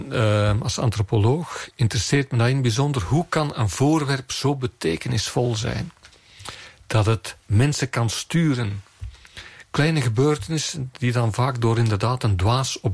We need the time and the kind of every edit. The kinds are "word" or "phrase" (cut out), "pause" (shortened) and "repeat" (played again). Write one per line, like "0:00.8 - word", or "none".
0:07.4 - pause